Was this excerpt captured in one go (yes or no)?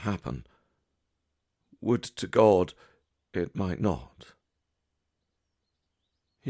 yes